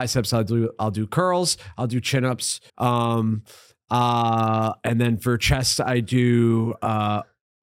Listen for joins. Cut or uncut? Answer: cut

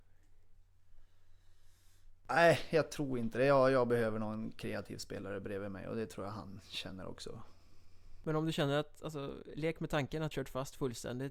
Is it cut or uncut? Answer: cut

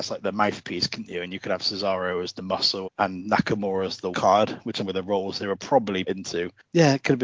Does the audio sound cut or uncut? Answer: cut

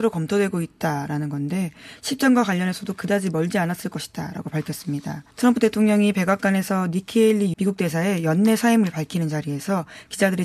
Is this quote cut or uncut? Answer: cut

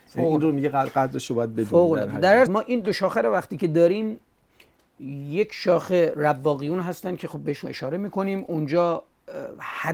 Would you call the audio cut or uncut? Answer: cut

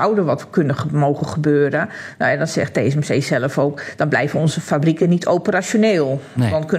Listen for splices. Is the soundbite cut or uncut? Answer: uncut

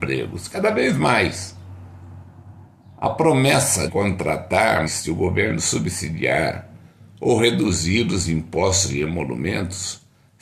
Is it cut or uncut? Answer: cut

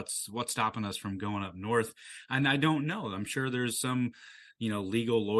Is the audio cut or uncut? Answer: uncut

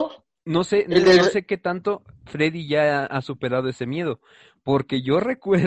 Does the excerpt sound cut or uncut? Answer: uncut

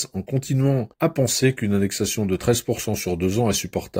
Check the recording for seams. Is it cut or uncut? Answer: cut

